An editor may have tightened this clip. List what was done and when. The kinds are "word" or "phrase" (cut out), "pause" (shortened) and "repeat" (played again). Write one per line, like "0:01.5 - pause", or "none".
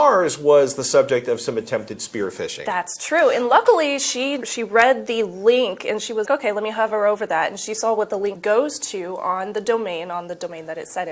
0:04.4 - word
0:06.2 - word
0:08.3 - word